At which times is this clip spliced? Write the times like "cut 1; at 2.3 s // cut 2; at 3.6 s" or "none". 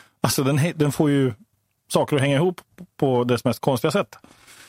none